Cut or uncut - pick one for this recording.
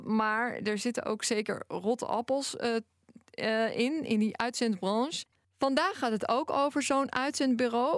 uncut